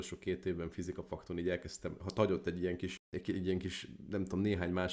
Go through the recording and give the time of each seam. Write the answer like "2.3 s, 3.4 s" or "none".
none

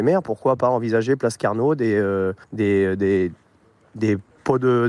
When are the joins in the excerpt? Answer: 2.4 s

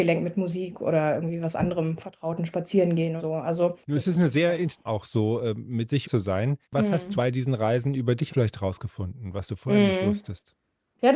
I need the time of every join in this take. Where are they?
3.2 s, 3.8 s, 4.9 s, 6.0 s, 6.6 s, 7.2 s, 8.3 s

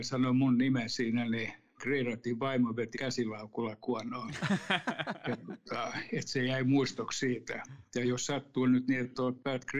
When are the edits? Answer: 1.8 s, 2.9 s

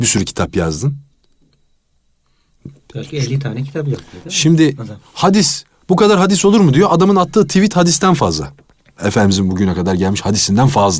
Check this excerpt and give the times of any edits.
none

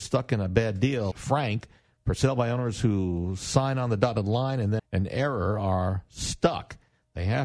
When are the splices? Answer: 1.1 s, 4.8 s

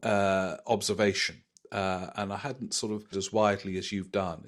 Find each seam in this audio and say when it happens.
3.1 s

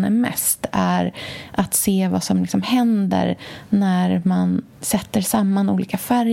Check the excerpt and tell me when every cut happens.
4.7 s

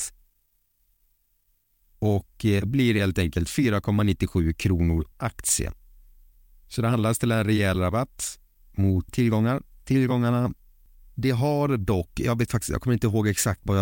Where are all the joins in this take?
5.1 s, 9.1 s

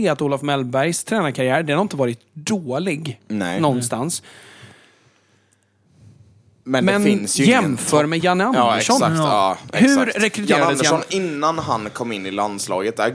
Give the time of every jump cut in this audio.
none

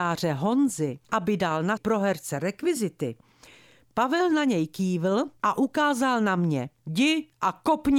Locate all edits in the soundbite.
1.0 s, 1.8 s, 5.4 s, 6.8 s

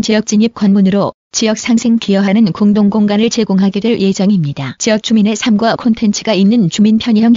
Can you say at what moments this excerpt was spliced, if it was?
2.0 s, 5.8 s

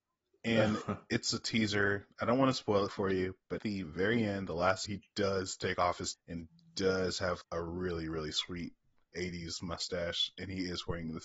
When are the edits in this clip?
3.6 s, 4.8 s, 6.1 s, 7.4 s

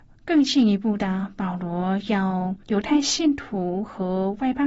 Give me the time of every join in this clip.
2.6 s

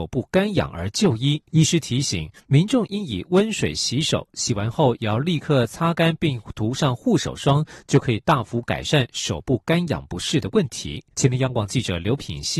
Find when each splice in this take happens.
1.5 s, 11.1 s

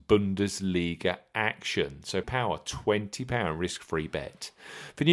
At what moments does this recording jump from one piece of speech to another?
2.2 s

